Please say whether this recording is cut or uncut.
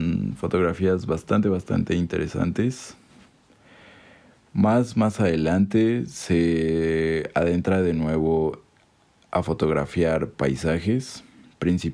uncut